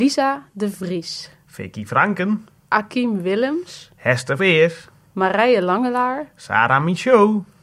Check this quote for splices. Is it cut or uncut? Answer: cut